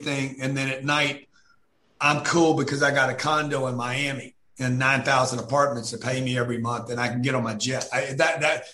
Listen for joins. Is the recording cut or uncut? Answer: uncut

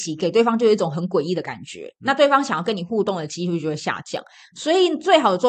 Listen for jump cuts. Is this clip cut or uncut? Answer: uncut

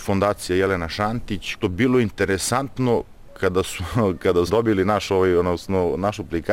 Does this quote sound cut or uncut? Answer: cut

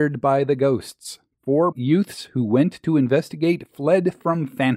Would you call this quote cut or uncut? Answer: cut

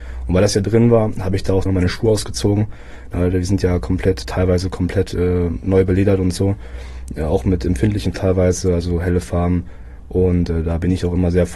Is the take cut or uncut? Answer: cut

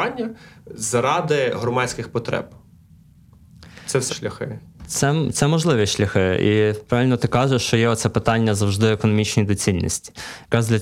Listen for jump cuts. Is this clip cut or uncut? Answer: cut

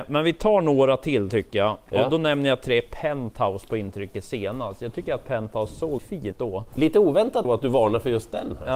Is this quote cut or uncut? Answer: cut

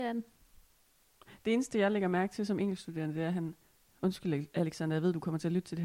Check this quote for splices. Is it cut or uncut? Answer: cut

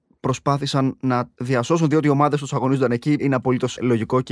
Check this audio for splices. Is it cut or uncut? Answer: uncut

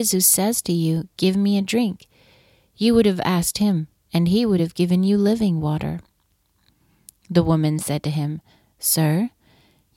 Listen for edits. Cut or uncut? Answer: uncut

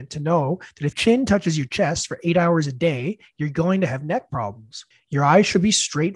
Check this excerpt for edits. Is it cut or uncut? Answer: cut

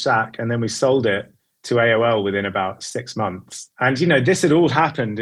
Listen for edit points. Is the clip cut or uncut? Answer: cut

